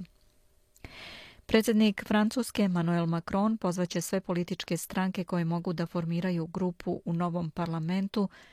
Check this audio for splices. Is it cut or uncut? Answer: uncut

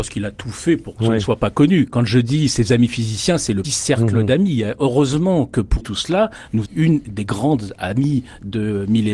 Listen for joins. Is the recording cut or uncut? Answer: cut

